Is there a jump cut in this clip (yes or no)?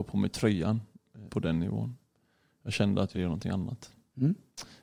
yes